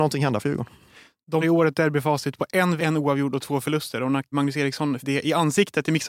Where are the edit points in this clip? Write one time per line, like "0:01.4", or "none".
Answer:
0:01.4
0:02.8
0:04.3
0:05.0